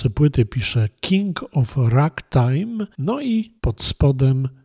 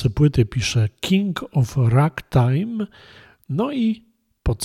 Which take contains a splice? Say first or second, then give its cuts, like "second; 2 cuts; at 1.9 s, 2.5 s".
first; 2 cuts; at 2.9 s, 3.6 s